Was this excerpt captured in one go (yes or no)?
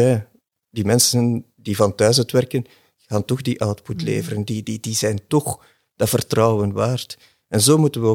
yes